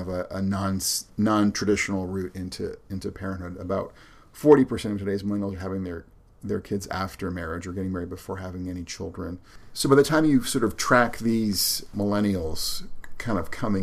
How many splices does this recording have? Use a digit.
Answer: 0